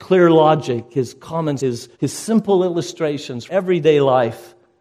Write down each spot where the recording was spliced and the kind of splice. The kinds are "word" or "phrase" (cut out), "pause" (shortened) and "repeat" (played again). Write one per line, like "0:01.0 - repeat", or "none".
0:01.6 - word
0:01.9 - pause
0:03.5 - word